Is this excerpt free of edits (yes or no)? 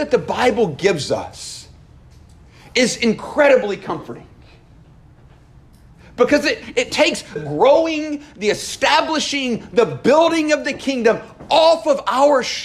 no